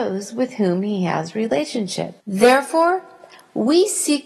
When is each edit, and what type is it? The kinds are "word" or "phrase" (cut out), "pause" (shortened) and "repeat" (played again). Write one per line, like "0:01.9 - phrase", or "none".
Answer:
0:02.2 - pause